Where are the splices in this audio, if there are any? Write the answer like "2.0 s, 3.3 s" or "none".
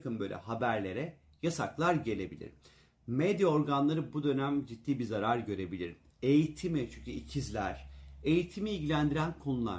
none